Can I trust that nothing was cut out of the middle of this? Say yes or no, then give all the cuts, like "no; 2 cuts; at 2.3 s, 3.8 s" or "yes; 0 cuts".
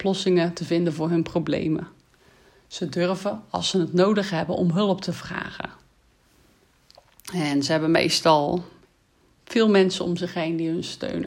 yes; 0 cuts